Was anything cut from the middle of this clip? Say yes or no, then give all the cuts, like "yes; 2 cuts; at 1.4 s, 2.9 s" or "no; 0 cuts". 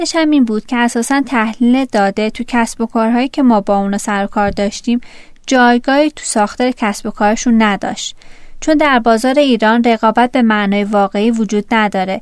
no; 0 cuts